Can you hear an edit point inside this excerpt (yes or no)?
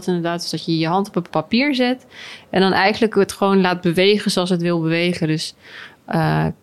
no